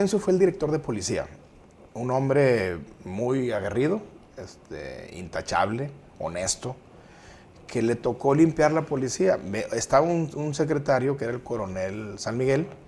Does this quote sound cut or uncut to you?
cut